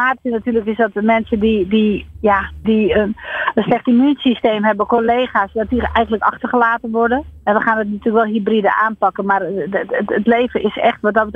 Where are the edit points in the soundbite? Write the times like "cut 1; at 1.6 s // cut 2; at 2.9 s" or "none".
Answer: cut 1; at 2.6 s // cut 2; at 7.4 s